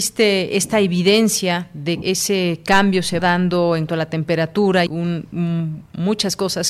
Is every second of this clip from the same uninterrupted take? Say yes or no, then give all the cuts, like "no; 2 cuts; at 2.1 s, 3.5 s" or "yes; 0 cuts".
no; 4 cuts; at 2.0 s, 3.2 s, 3.9 s, 4.9 s